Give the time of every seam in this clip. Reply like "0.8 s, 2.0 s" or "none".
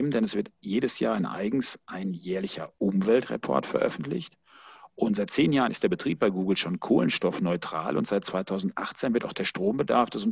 none